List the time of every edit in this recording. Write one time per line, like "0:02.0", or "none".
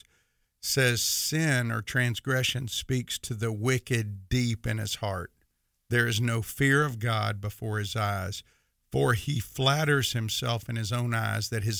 none